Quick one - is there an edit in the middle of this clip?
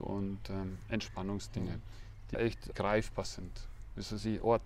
yes; 2 cuts; at 2.3 s, 2.7 s

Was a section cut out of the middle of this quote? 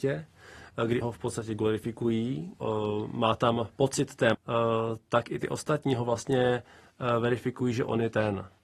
yes; 3 cuts; at 1.0 s, 2.6 s, 4.3 s

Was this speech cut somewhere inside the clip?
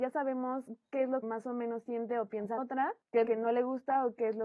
yes; 3 cuts; at 1.2 s, 2.6 s, 3.3 s

